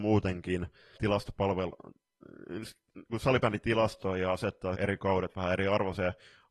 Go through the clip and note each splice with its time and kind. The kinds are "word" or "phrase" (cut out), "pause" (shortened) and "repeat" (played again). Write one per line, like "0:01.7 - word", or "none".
0:01.0 - word
0:04.7 - word